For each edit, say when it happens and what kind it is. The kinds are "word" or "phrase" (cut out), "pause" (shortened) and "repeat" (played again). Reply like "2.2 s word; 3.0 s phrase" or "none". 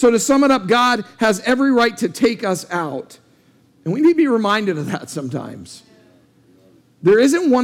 none